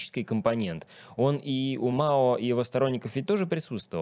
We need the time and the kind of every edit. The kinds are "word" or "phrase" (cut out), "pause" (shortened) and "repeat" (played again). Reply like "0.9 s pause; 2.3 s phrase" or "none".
none